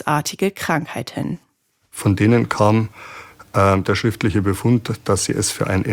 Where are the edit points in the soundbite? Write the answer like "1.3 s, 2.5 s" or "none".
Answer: none